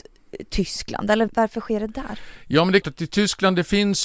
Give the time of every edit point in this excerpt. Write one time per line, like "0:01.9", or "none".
0:01.3
0:02.8